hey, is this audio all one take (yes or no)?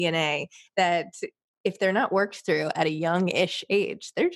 yes